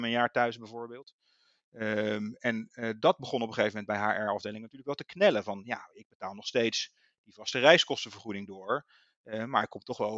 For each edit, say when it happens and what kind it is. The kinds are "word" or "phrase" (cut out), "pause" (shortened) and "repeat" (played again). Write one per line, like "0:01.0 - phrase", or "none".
none